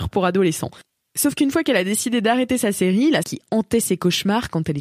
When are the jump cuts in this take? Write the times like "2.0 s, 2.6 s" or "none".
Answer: 3.2 s